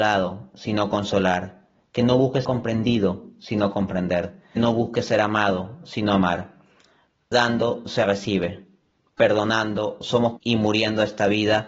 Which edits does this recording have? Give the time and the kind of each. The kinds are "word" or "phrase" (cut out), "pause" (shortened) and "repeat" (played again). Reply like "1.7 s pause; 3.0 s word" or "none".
2.4 s word; 4.6 s word; 7.3 s word; 10.4 s word